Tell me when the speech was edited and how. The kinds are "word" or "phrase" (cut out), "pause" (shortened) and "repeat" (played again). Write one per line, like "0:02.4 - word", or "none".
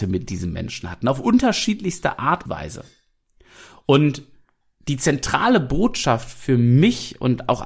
0:02.5 - word
0:04.6 - pause